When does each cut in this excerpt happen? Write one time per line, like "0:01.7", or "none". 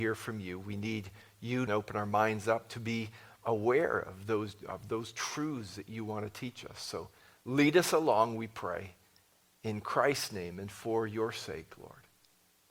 0:01.7